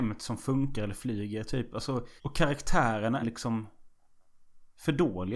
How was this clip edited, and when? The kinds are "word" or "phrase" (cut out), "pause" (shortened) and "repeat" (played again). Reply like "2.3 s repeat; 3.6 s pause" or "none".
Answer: 2.2 s pause; 3.2 s word